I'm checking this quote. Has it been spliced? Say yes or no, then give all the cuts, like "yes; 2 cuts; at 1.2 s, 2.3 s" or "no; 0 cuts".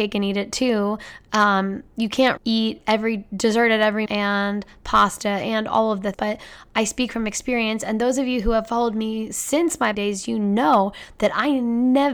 yes; 4 cuts; at 2.4 s, 4.1 s, 6.1 s, 9.9 s